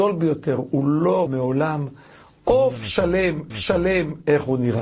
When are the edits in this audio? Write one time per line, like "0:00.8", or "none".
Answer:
0:01.3
0:03.5